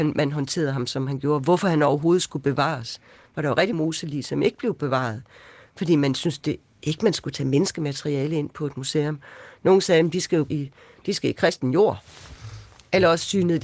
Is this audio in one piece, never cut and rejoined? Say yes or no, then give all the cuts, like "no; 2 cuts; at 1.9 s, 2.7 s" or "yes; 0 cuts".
no; 2 cuts; at 3.7 s, 10.5 s